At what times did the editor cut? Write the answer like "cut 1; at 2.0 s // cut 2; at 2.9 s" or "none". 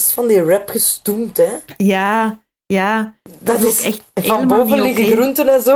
none